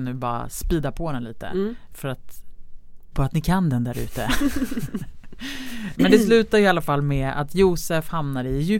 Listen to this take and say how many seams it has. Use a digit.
2